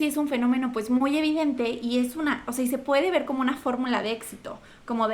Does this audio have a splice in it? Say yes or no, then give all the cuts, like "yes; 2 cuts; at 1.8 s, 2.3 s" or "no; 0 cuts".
no; 0 cuts